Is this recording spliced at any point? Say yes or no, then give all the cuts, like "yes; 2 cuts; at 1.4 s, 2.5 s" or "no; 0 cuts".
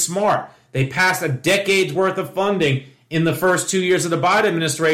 no; 0 cuts